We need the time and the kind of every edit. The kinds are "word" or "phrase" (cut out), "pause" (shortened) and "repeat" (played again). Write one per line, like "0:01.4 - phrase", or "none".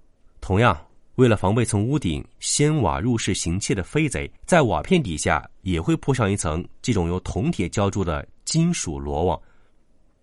0:04.4 - pause